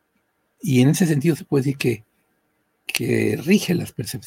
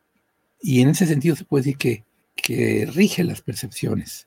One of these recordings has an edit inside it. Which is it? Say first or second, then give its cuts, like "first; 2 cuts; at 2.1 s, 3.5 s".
second; 1 cut; at 2.2 s